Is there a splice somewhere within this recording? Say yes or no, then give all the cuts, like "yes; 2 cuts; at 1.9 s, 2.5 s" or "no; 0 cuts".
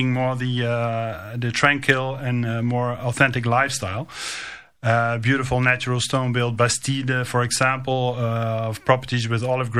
no; 0 cuts